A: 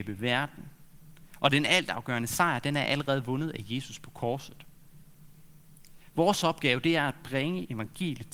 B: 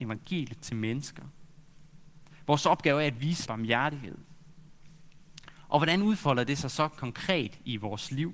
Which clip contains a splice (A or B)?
B